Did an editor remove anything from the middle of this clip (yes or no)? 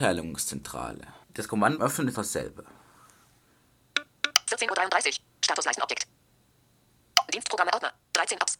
yes